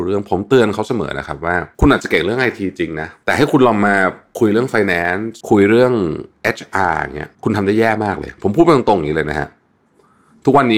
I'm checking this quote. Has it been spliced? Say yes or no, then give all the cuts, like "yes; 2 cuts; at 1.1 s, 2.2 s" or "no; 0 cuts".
yes; 2 cuts; at 5.4 s, 7.3 s